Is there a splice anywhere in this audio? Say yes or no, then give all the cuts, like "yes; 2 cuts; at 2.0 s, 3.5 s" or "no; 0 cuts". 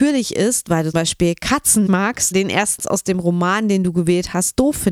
yes; 4 cuts; at 0.9 s, 1.9 s, 2.3 s, 2.8 s